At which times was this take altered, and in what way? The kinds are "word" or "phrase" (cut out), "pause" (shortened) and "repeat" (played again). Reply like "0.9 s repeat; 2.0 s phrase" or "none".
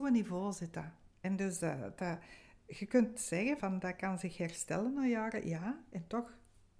1.1 s pause; 3.6 s word